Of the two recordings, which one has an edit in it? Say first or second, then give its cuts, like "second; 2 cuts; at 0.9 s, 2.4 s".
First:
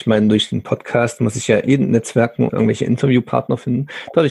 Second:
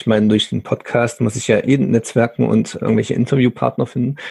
first; 1 cut; at 2.5 s